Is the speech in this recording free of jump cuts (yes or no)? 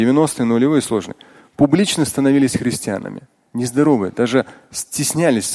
yes